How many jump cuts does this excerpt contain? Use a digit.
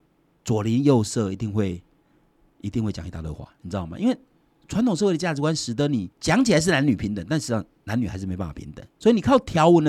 1